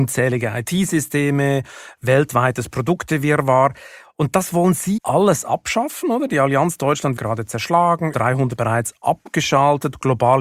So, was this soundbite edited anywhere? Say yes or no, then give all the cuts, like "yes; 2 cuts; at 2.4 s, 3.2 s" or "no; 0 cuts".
yes; 4 cuts; at 5.0 s, 7.2 s, 8.1 s, 8.6 s